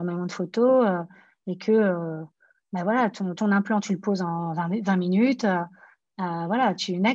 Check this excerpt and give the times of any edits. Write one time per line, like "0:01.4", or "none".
none